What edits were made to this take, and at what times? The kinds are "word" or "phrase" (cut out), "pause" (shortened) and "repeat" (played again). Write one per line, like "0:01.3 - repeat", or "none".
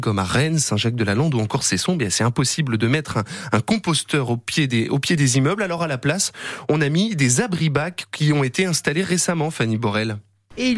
none